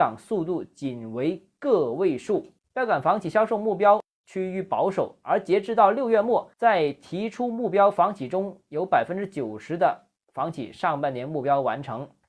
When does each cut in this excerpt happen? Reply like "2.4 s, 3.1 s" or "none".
6.5 s